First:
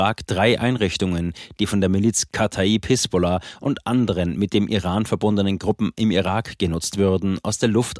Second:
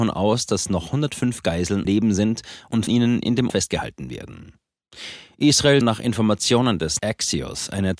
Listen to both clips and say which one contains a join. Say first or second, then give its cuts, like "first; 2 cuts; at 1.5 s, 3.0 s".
second; 5 cuts; at 1.8 s, 2.9 s, 3.5 s, 5.8 s, 7.0 s